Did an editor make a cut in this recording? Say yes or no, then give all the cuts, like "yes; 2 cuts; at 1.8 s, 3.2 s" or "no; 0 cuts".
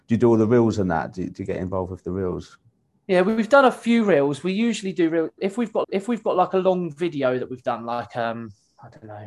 yes; 1 cut; at 5.8 s